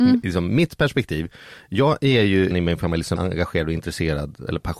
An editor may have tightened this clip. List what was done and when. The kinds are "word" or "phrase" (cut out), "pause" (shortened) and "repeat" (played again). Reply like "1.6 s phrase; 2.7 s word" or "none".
2.5 s word; 3.2 s word